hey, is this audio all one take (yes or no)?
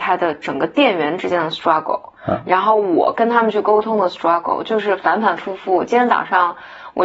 no